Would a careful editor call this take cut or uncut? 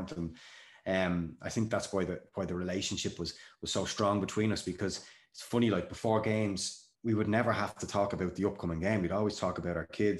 cut